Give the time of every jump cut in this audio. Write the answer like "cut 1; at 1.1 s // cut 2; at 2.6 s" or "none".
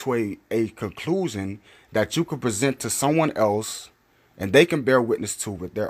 none